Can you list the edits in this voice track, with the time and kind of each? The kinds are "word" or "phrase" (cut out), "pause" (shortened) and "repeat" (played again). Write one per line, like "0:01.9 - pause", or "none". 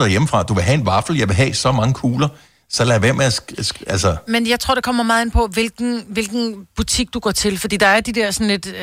none